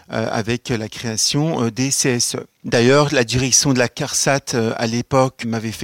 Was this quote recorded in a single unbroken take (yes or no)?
no